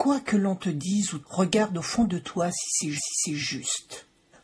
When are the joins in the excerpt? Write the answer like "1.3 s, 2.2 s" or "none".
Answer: 1.2 s, 3.0 s